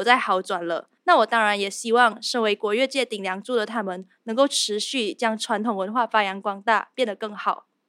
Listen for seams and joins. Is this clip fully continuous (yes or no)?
no